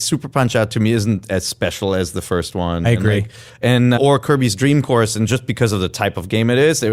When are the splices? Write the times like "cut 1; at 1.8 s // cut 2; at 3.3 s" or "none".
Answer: cut 1; at 4.0 s